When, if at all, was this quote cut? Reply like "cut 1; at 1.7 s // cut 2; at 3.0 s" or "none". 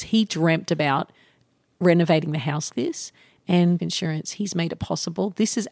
cut 1; at 2.7 s // cut 2; at 3.8 s